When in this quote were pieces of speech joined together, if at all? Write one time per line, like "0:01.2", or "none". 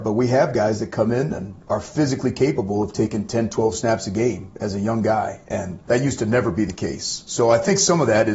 0:05.9